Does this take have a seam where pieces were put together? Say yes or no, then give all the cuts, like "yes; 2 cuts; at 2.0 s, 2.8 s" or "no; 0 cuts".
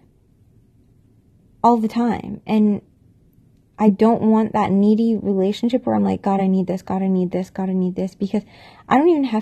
no; 0 cuts